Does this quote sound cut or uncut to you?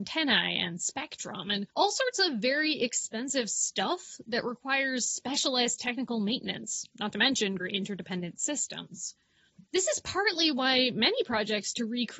cut